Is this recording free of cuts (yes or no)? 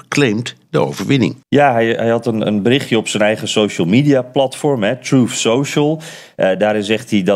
no